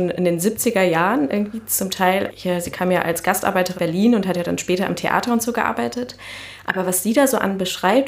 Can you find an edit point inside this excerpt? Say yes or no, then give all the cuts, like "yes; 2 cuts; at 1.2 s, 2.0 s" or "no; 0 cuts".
yes; 2 cuts; at 2.3 s, 3.7 s